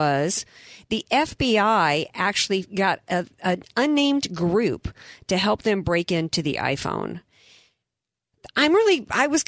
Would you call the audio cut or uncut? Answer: uncut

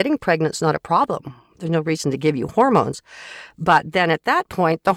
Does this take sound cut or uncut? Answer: uncut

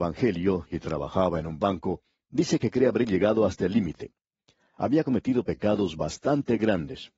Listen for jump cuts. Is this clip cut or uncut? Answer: uncut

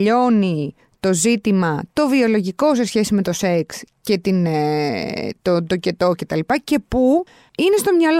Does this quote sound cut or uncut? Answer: uncut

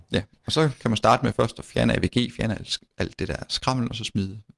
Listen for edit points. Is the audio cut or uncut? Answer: uncut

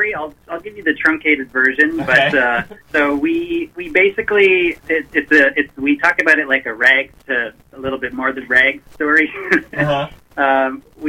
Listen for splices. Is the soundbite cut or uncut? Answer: cut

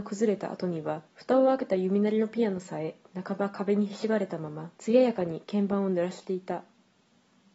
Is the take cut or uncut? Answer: cut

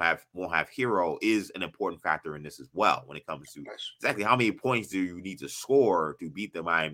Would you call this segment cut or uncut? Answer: uncut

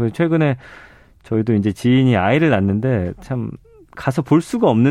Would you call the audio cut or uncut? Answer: uncut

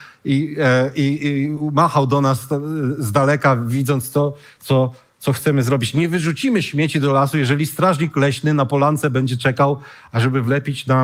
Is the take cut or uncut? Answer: uncut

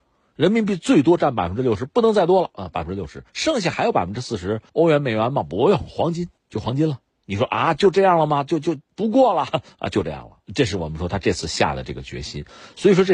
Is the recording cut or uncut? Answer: cut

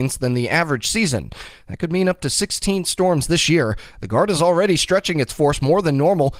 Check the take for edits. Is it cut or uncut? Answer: uncut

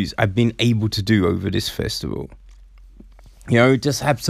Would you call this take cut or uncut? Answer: uncut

